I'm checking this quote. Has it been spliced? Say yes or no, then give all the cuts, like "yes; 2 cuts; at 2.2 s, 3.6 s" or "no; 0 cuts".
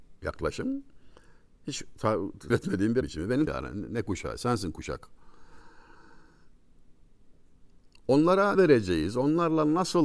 yes; 4 cuts; at 2.5 s, 3.0 s, 3.5 s, 8.5 s